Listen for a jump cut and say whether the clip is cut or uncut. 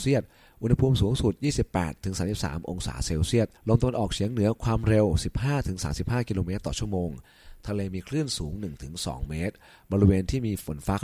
cut